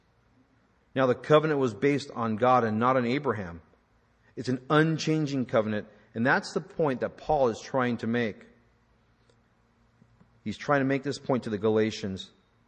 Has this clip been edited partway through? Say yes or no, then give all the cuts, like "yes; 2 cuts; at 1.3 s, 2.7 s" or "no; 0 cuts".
no; 0 cuts